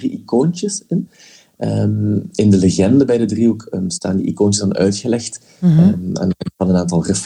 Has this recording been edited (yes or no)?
no